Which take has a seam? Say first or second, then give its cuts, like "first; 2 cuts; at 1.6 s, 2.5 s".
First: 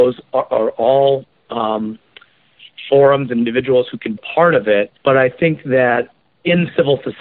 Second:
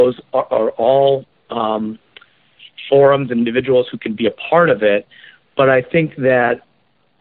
first; 3 cuts; at 4.2 s, 5.0 s, 6.2 s